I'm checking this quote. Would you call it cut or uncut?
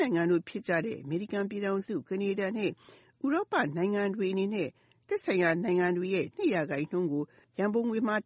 cut